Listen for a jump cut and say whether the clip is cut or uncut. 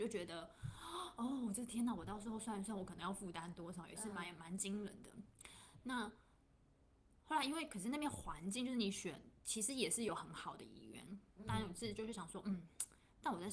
uncut